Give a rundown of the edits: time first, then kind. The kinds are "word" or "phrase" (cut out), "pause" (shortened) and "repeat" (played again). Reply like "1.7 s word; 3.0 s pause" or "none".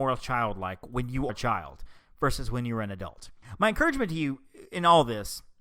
1.3 s word

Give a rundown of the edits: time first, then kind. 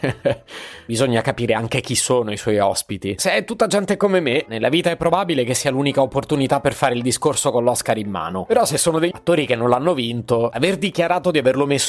9.1 s word

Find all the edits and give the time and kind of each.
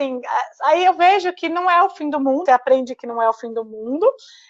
2.5 s word

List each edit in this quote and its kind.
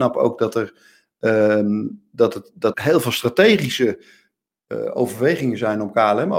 2.7 s word

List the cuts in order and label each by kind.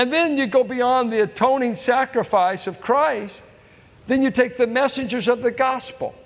none

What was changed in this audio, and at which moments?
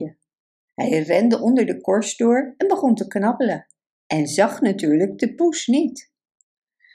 none

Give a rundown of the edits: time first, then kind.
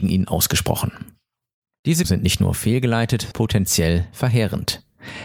2.0 s word; 3.3 s word

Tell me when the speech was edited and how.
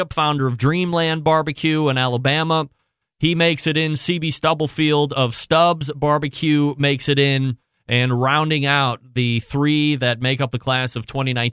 none

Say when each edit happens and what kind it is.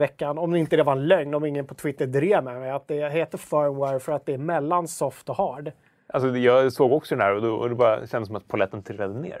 none

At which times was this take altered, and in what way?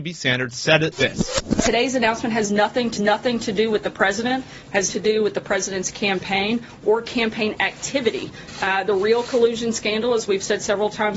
0.9 s word; 3.0 s repeat; 4.9 s word

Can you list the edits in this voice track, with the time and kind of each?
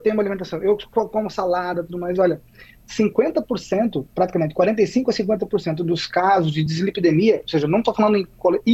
none

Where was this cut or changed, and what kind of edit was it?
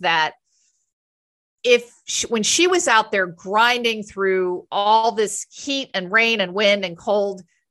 none

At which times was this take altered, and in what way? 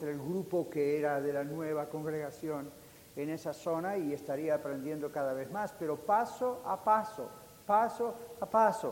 none

